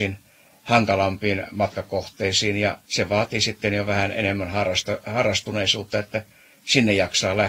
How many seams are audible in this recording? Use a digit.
1